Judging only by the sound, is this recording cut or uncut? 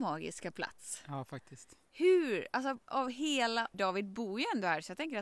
cut